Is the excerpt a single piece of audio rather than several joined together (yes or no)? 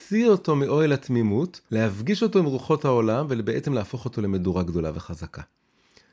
yes